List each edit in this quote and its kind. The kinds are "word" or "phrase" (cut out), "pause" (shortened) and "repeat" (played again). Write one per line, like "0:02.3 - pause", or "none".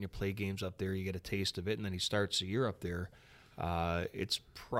none

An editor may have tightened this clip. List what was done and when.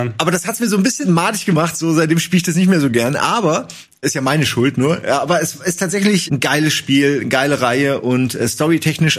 0:01.0 - word
0:04.0 - word
0:06.3 - word

